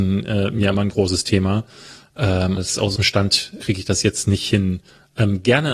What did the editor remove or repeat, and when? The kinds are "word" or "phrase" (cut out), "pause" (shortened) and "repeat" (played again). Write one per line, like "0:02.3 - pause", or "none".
0:00.9 - word
0:02.6 - word
0:03.0 - word
0:03.6 - word